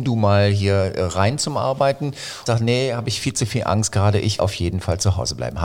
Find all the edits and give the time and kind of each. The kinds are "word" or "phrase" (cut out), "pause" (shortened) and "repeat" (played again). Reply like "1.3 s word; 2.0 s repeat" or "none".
2.5 s word; 4.4 s word